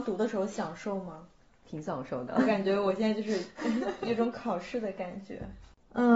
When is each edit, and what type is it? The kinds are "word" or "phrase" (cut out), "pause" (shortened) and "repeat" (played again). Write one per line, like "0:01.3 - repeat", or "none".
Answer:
none